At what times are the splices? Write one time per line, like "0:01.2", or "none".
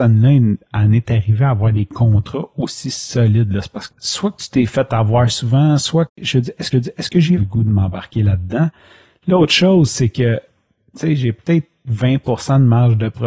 0:03.9
0:06.7
0:07.4